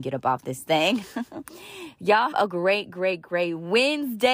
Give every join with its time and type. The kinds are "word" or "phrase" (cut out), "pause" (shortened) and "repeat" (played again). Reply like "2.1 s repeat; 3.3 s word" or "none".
2.3 s word